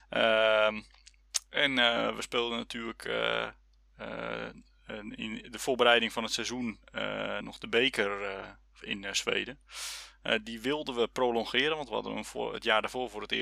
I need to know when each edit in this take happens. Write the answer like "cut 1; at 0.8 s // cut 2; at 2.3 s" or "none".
cut 1; at 7.4 s